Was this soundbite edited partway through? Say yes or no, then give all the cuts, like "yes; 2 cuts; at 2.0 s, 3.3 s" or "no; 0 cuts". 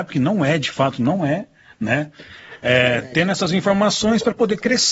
no; 0 cuts